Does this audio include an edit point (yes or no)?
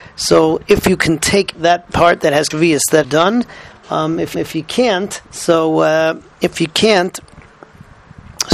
yes